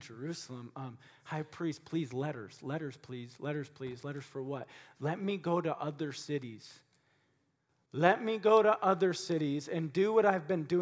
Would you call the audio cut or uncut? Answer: uncut